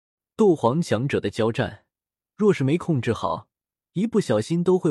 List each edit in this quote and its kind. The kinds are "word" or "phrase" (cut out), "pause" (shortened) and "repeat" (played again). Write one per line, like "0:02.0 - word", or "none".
none